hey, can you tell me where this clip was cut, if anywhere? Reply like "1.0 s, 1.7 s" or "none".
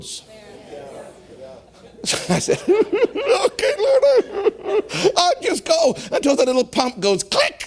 none

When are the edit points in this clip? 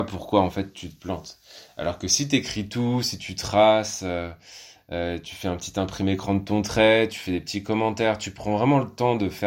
none

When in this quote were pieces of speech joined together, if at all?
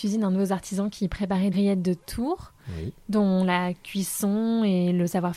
1.5 s

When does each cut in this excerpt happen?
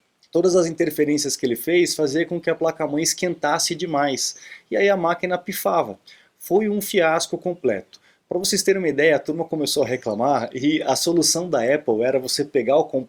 none

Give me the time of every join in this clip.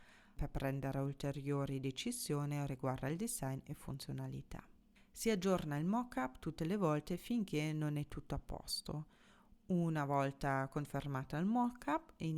none

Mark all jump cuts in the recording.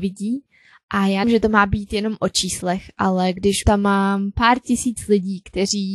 1.2 s, 3.6 s

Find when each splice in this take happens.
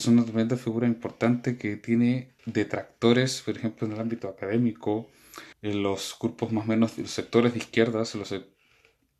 2.4 s, 5.5 s

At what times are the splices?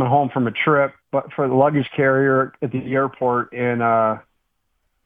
1.0 s

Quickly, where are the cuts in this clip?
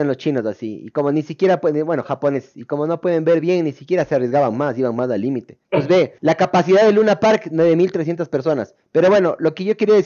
5.6 s, 6.2 s

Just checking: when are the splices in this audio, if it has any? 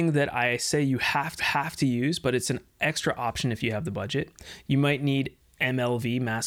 1.4 s

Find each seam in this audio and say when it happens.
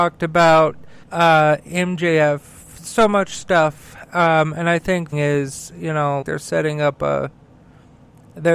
1.0 s, 5.1 s, 6.2 s

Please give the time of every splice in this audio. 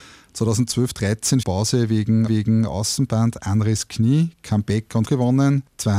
1.4 s, 2.3 s, 5.1 s

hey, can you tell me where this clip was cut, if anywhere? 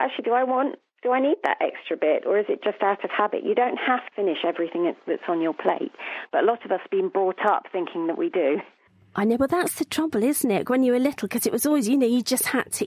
4.1 s

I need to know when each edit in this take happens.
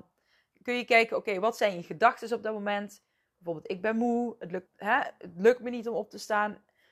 4.7 s

